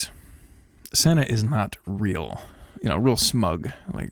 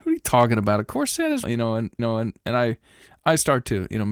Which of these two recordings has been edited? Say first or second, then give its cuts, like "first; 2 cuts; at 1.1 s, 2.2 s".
second; 2 cuts; at 1.4 s, 2.0 s